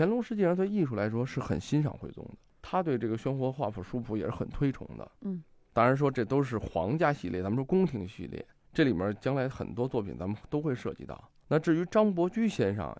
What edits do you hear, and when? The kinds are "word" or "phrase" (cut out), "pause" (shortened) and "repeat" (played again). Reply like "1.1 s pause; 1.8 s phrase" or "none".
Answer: none